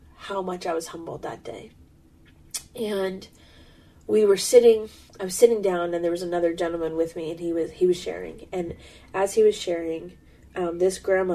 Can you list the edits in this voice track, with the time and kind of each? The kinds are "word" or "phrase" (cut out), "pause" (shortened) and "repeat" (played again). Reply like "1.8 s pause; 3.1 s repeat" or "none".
5.1 s pause